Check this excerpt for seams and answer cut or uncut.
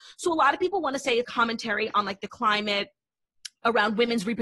cut